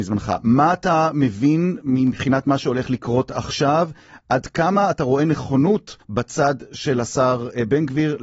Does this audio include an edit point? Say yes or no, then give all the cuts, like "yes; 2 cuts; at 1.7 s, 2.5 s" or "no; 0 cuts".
yes; 1 cut; at 6.0 s